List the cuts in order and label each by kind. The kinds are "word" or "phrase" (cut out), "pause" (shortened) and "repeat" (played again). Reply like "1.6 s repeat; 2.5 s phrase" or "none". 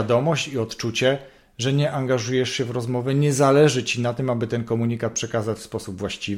none